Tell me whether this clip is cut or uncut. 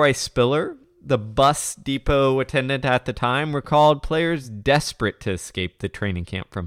uncut